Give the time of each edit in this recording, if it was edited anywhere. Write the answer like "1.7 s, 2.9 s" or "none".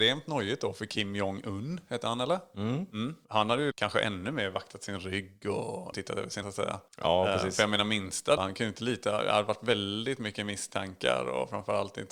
3.7 s, 5.9 s, 6.4 s, 8.4 s